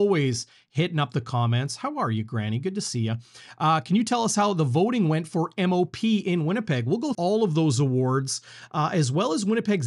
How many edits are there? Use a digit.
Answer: 1